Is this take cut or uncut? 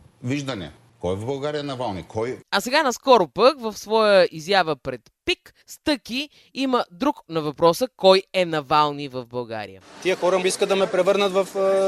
cut